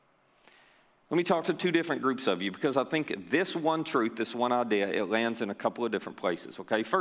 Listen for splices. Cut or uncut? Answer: uncut